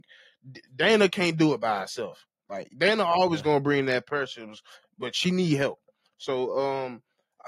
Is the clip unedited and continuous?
yes; 0 cuts

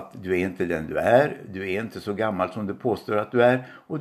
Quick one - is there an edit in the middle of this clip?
no; 0 cuts

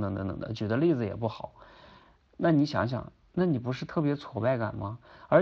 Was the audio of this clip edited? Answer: no; 0 cuts

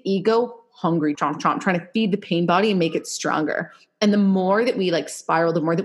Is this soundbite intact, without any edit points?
no; 1 cut; at 1.1 s

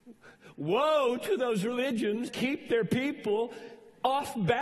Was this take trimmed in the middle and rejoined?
yes; 1 cut; at 2.3 s

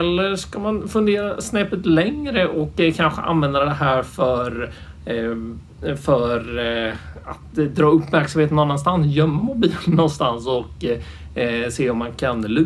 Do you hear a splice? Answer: no; 0 cuts

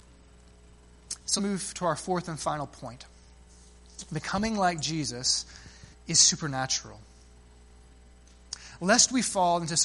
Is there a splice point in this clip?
yes; 2 cuts; at 1.4 s, 5.9 s

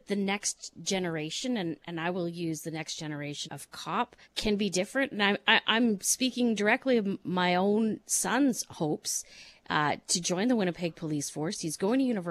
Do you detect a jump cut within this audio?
yes; 2 cuts; at 3.4 s, 4.2 s

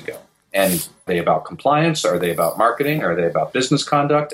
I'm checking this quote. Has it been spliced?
yes; 1 cut; at 1.1 s

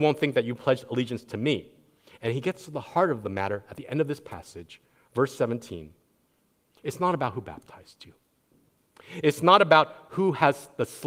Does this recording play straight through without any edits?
yes; 0 cuts

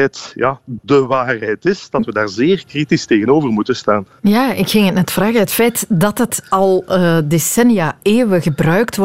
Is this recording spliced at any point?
no; 0 cuts

